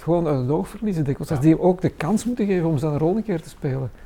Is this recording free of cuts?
yes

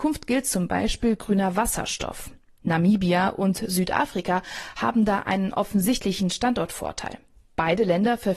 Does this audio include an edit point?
no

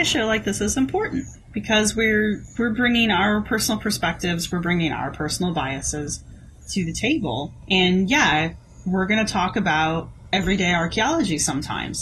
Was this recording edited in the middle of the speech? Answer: no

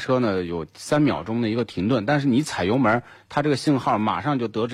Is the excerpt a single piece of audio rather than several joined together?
yes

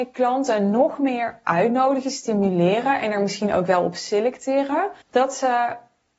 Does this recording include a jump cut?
yes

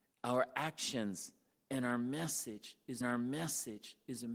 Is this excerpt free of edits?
no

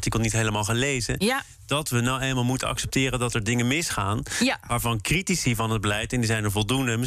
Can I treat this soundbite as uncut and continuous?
yes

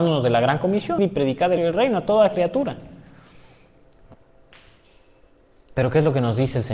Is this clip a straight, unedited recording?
no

